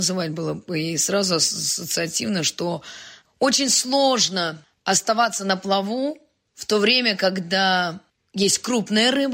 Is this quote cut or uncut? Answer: uncut